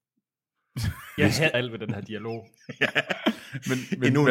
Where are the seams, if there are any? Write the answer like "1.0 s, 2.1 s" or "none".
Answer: 1.2 s, 1.5 s

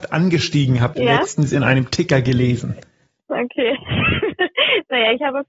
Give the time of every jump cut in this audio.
0.9 s

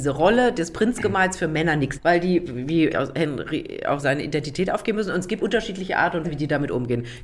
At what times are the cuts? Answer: 2.0 s, 2.9 s, 4.0 s, 5.4 s, 6.2 s

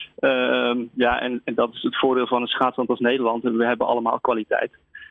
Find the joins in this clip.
none

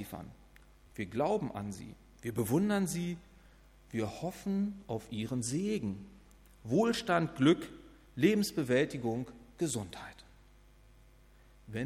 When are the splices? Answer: none

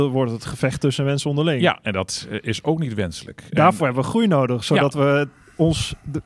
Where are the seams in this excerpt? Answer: none

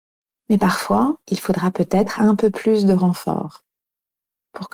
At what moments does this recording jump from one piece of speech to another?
1.2 s, 2.1 s

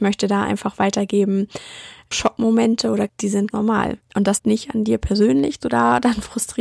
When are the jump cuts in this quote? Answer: 2.1 s, 3.1 s, 3.5 s, 4.0 s, 4.4 s, 5.6 s

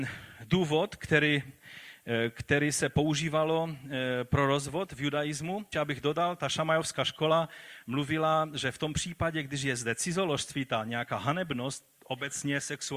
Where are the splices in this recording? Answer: 5.7 s

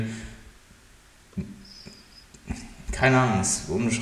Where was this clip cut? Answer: none

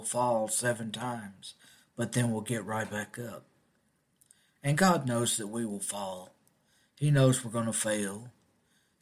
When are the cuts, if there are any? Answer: none

